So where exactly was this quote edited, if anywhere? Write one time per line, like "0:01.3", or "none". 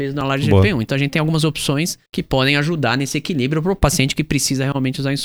0:02.1